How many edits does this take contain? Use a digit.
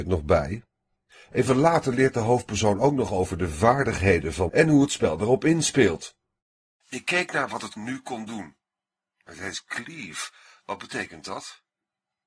2